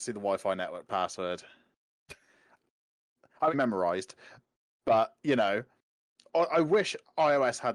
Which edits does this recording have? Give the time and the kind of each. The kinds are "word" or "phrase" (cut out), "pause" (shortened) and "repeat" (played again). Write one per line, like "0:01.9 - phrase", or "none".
0:03.5 - phrase